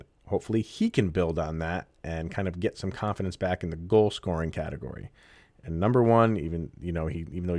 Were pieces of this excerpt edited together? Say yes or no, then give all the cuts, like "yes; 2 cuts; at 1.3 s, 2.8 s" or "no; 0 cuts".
no; 0 cuts